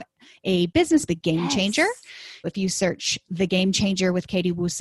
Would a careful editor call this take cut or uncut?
cut